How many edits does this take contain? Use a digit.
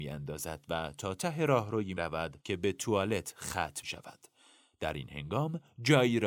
3